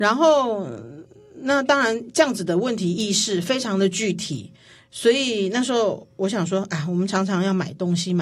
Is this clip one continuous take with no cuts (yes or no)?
yes